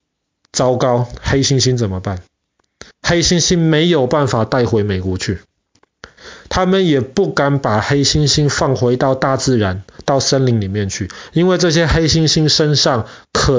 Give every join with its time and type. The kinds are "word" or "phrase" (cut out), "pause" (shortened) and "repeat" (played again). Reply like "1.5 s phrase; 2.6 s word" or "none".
2.9 s pause